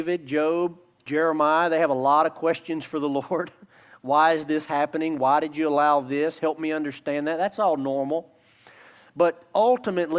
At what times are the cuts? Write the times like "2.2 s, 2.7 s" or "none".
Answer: none